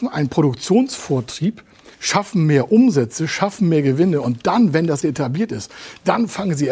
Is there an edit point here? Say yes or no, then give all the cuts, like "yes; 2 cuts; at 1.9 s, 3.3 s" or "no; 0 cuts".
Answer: yes; 2 cuts; at 1.9 s, 5.0 s